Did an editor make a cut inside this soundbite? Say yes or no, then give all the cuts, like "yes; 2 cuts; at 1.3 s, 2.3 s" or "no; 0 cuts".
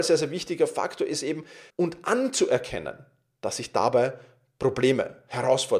yes; 1 cut; at 1.7 s